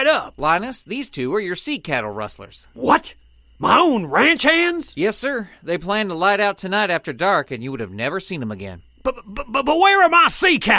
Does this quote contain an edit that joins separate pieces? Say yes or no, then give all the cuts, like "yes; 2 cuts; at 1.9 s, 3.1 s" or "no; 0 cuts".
no; 0 cuts